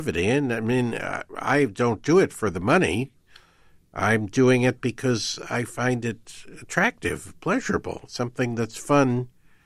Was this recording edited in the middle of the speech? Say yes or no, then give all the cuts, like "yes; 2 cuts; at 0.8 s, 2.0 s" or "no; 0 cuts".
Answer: no; 0 cuts